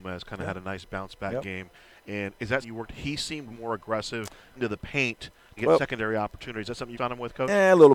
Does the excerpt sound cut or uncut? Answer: cut